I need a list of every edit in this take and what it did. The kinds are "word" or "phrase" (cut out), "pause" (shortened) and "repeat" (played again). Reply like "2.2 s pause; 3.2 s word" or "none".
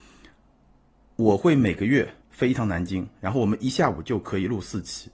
2.2 s pause